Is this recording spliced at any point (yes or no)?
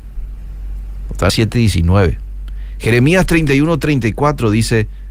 yes